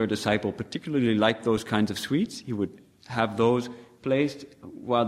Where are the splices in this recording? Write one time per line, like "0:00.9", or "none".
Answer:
none